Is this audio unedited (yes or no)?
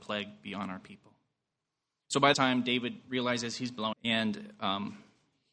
no